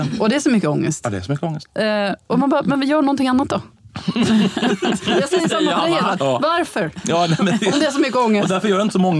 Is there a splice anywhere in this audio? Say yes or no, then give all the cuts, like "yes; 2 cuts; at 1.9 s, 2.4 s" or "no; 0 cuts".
no; 0 cuts